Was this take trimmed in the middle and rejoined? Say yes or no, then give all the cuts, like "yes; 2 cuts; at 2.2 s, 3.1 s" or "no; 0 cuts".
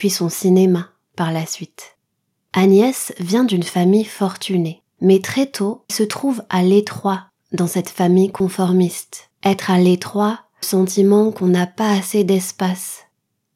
yes; 5 cuts; at 2.1 s, 4.9 s, 5.9 s, 9.3 s, 10.6 s